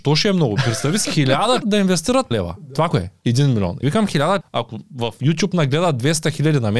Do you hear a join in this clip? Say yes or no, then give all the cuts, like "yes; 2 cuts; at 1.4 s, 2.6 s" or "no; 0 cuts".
yes; 6 cuts; at 1.0 s, 1.6 s, 2.3 s, 2.9 s, 3.8 s, 4.4 s